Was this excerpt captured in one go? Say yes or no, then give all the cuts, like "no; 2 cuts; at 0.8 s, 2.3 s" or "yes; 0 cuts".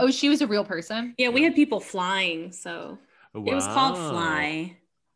yes; 0 cuts